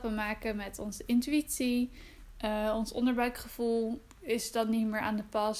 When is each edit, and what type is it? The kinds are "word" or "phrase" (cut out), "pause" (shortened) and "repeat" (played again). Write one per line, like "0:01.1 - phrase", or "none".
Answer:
0:04.1 - pause